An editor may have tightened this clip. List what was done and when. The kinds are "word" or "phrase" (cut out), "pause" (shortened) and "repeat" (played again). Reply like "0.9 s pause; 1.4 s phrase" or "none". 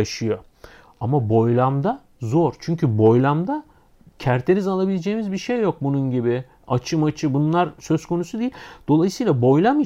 none